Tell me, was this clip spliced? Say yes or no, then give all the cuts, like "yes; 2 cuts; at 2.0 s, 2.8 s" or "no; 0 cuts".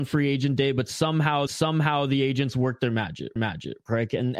yes; 2 cuts; at 1.5 s, 3.4 s